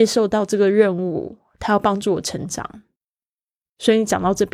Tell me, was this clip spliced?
no; 0 cuts

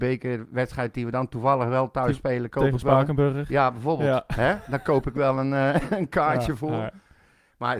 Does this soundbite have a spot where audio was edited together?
no; 0 cuts

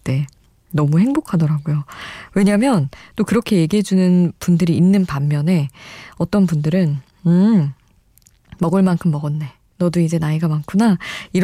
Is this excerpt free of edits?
yes; 0 cuts

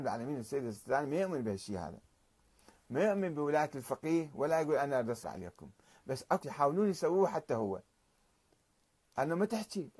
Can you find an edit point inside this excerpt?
yes; 2 cuts; at 5.2 s, 6.4 s

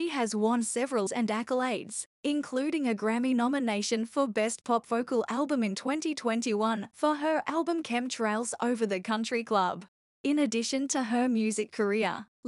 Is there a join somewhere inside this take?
yes; 1 cut; at 1.1 s

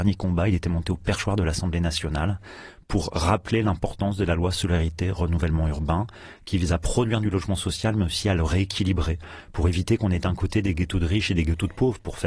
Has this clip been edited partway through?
no; 0 cuts

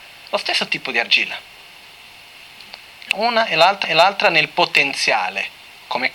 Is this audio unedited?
no; 2 cuts; at 3.1 s, 3.8 s

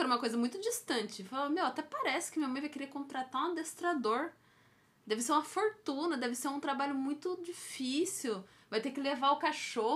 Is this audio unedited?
yes; 0 cuts

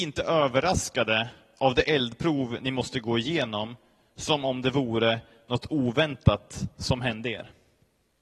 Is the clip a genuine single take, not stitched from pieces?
yes; 0 cuts

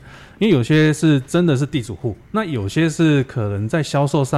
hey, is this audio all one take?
no; 1 cut; at 2.2 s

